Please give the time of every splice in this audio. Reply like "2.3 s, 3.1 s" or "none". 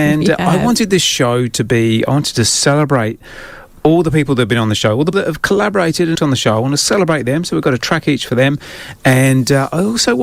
5.1 s, 6.1 s